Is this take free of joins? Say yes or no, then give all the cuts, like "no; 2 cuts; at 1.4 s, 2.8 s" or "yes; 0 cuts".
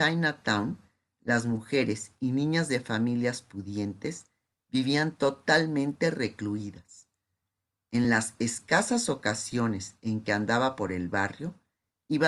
yes; 0 cuts